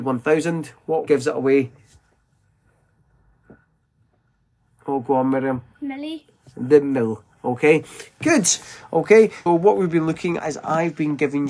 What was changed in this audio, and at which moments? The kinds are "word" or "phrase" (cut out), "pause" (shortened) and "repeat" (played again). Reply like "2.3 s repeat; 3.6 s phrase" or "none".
1.1 s word; 9.5 s word; 10.4 s word